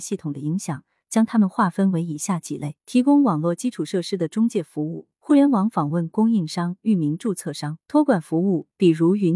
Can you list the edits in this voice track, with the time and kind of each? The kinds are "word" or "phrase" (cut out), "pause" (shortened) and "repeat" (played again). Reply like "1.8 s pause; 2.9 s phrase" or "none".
2.8 s pause; 5.1 s pause; 7.8 s pause